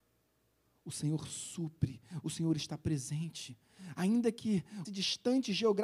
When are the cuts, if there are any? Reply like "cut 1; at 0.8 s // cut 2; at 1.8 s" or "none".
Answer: cut 1; at 4.8 s